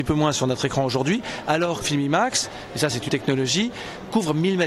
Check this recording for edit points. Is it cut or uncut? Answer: cut